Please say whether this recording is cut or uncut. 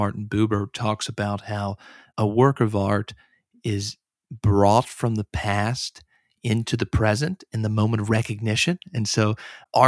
uncut